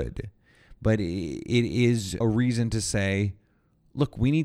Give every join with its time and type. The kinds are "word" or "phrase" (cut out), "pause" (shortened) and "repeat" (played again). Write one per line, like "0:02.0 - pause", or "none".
0:02.2 - word

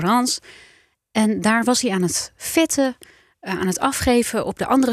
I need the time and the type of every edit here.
none

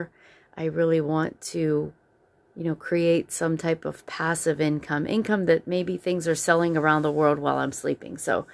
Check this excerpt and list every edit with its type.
none

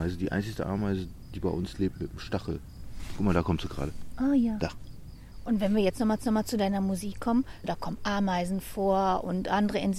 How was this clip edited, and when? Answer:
0:06.2 - repeat

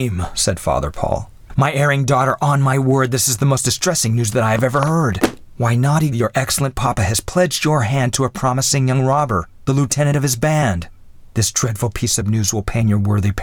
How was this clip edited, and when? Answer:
0:06.1 - word

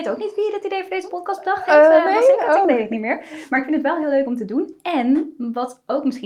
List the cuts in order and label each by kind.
none

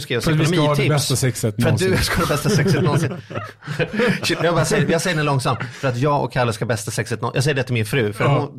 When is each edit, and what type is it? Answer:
none

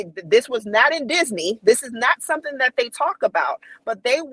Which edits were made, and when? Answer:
none

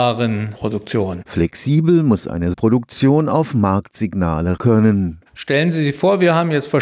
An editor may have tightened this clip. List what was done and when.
0:02.5 - word
0:04.6 - word

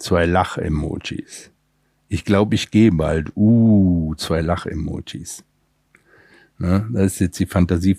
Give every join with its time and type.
none

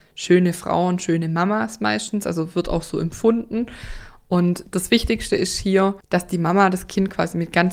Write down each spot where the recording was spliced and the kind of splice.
none

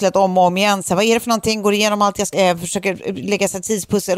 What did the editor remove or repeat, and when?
0:02.3 - word

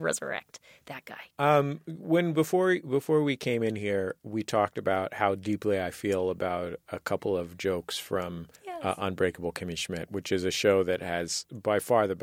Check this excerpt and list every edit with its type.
0:01.3 - pause
0:08.6 - pause

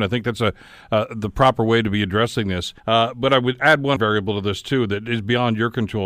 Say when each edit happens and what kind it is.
0:02.8 - pause
0:04.0 - word

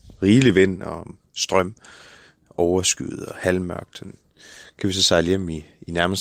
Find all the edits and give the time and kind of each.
none

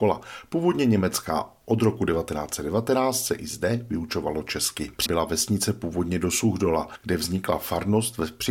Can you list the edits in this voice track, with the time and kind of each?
0:05.1 - word

